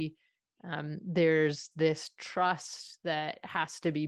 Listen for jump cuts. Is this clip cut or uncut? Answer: uncut